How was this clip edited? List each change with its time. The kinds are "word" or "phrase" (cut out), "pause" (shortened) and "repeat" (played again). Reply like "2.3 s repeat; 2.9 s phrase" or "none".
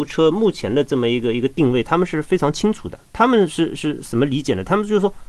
3.1 s pause